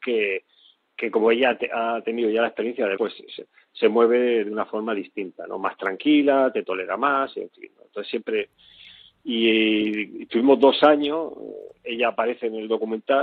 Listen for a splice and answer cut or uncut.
cut